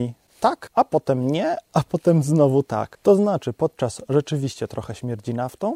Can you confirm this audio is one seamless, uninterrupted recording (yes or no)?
no